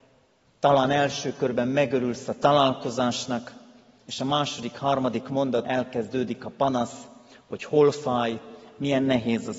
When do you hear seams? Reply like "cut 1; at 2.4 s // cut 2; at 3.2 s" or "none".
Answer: cut 1; at 5.6 s